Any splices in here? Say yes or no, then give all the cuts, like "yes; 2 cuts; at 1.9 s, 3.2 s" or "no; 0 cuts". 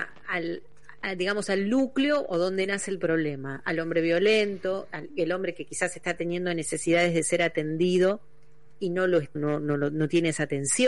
yes; 2 cuts; at 1.0 s, 9.4 s